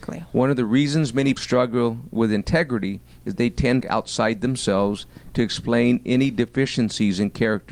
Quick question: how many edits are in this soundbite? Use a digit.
3